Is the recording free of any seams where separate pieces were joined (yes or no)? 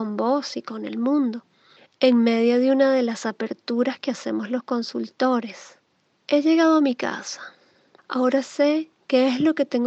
yes